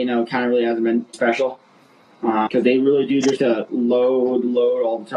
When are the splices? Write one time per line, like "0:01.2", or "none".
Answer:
0:01.1
0:02.5
0:03.4